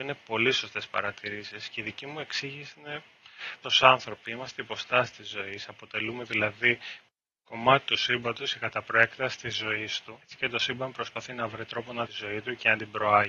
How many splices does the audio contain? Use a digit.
4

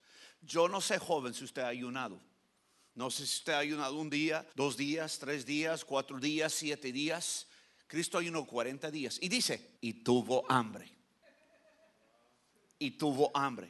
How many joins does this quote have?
2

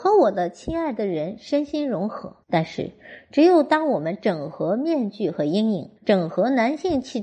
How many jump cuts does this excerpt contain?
2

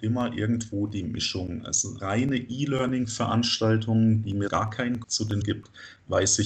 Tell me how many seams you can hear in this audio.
4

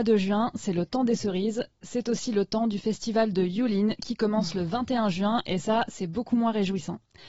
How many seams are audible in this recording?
0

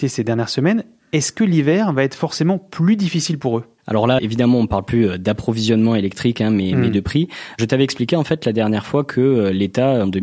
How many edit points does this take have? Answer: 1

